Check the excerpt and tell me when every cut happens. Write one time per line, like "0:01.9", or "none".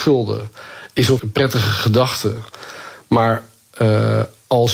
0:01.2